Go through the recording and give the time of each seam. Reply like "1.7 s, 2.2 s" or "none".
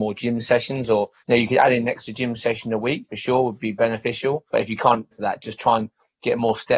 1.2 s, 4.5 s, 5.1 s